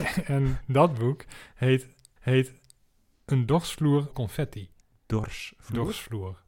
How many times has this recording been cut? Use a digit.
3